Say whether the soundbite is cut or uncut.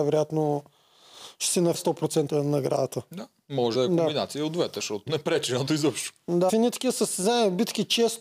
cut